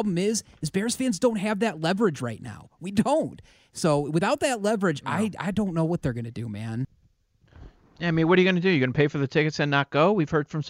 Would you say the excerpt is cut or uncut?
uncut